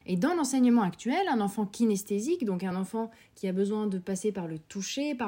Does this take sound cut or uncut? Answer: uncut